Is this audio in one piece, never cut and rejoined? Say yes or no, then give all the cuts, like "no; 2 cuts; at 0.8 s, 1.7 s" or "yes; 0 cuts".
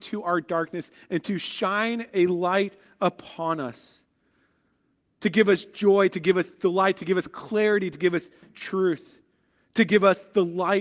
yes; 0 cuts